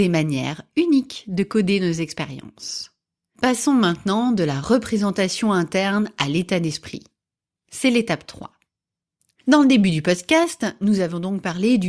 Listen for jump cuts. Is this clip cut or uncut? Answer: uncut